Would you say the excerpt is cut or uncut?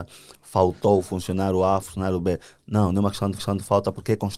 cut